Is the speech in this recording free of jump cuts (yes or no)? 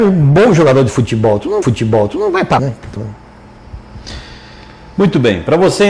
no